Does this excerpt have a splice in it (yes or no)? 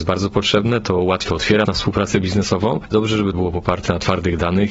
yes